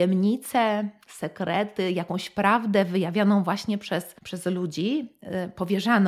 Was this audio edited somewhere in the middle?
yes; 1 cut; at 4.2 s

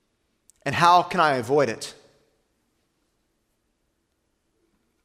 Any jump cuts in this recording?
no; 0 cuts

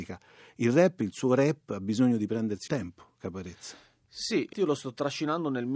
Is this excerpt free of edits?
no; 2 cuts; at 2.7 s, 4.5 s

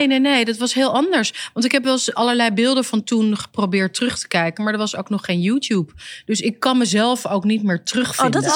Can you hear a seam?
no; 0 cuts

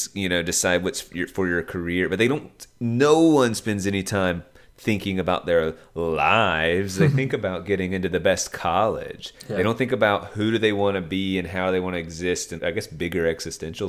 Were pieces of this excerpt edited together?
yes; 1 cut; at 12.6 s

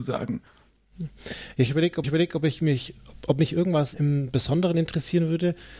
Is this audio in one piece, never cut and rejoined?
no; 2 cuts; at 2.0 s, 3.9 s

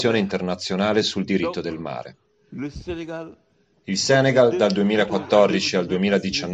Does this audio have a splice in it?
no; 0 cuts

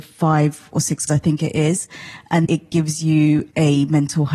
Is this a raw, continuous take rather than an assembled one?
no; 2 cuts; at 1.1 s, 2.4 s

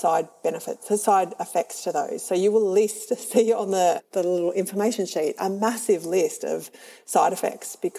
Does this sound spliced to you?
yes; 1 cut; at 4.0 s

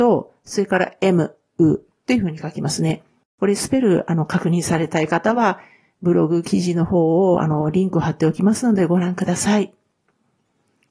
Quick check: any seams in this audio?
no; 0 cuts

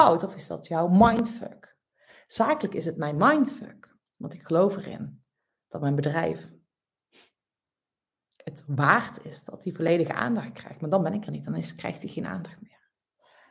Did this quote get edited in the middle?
no; 0 cuts

